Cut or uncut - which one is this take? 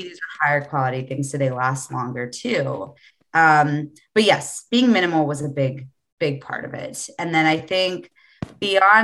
uncut